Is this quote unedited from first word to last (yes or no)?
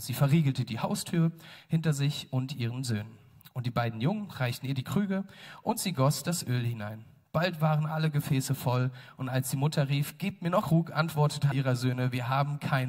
no